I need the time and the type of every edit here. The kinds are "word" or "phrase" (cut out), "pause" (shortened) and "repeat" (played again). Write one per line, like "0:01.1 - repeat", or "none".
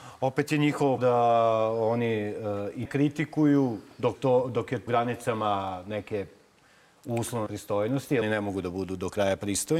0:01.0 - word
0:02.8 - word
0:04.1 - word
0:04.9 - word
0:07.5 - word
0:08.2 - word